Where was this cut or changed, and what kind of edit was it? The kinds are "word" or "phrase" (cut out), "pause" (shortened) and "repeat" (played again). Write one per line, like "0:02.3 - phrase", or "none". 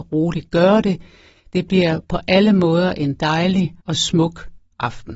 0:03.8 - pause